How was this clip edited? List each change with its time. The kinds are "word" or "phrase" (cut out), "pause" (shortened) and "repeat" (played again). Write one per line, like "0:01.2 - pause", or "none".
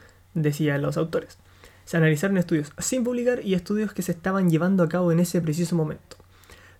none